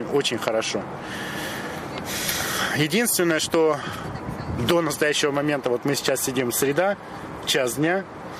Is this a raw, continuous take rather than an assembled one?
yes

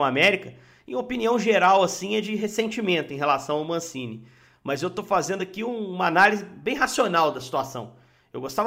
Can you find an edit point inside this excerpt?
no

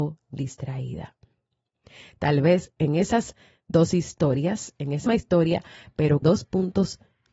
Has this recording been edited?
yes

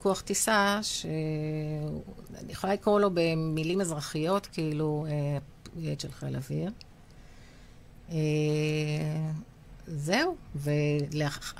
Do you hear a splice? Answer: yes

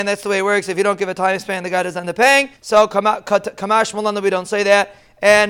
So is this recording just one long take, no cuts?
no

